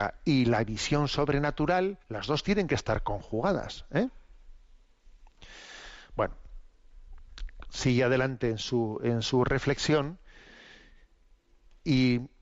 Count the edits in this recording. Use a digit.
1